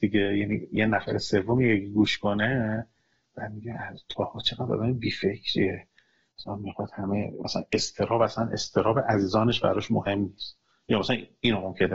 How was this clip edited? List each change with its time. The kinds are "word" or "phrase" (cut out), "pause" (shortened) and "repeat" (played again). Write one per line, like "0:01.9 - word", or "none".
none